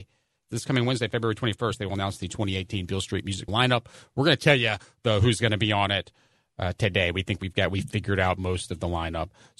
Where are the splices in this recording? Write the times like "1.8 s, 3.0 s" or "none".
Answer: 3.5 s